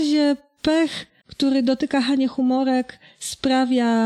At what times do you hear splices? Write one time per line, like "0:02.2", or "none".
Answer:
0:01.2